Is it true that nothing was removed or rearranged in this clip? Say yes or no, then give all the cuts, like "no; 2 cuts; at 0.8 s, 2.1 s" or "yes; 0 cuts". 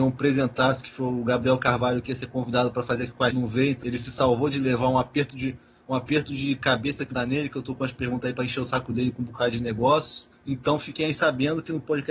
no; 3 cuts; at 3.3 s, 3.8 s, 7.1 s